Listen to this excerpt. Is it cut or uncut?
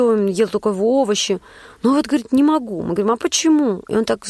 uncut